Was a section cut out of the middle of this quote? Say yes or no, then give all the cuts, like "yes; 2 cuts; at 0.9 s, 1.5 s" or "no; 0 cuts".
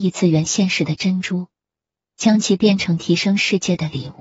no; 0 cuts